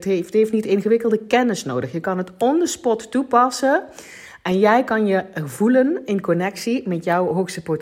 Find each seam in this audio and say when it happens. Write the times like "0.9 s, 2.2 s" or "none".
none